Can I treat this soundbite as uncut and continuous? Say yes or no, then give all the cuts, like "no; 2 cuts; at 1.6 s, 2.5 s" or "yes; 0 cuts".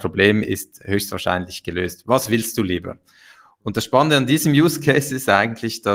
yes; 0 cuts